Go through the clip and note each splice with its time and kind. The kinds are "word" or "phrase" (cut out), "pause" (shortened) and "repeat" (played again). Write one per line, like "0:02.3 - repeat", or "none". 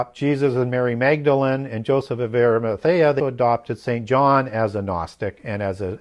0:03.2 - word